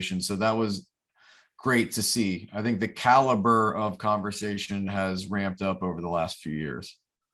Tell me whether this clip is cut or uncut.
uncut